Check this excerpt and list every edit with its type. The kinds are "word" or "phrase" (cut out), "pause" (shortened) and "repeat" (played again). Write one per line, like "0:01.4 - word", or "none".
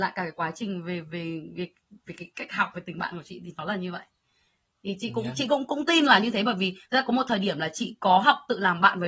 none

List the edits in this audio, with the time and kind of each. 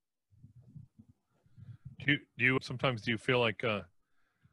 none

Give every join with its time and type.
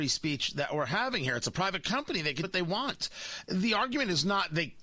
0:02.4 - word

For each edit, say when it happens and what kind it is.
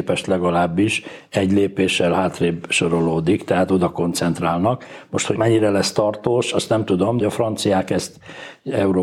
0:05.4 - word
0:07.2 - word

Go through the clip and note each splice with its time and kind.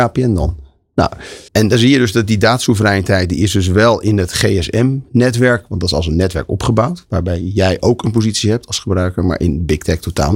0:01.5 - word

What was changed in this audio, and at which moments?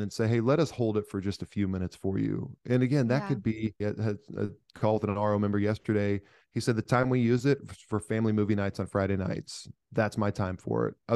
0:03.8 - word

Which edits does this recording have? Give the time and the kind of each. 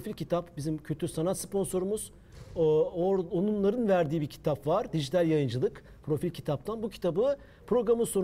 none

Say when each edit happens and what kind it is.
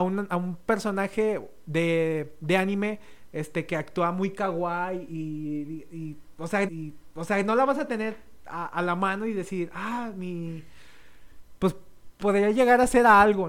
0:06.7 - repeat

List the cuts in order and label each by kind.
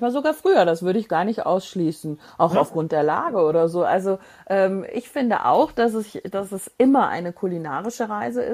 none

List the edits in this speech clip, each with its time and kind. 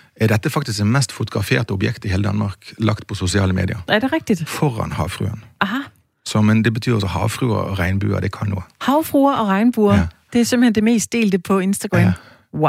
none

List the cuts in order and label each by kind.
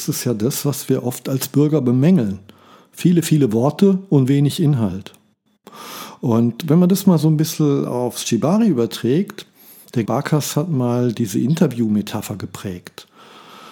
0:10.1 - word

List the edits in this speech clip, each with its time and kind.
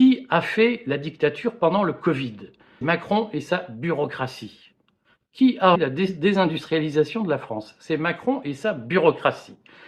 0:02.8 - word
0:05.7 - word

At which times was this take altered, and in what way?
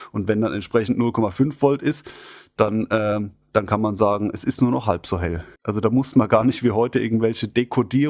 0:05.6 - pause

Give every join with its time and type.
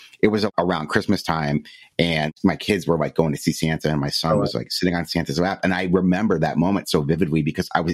none

